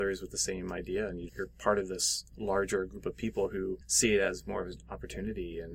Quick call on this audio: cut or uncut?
cut